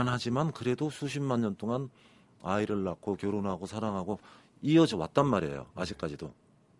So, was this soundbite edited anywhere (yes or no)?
no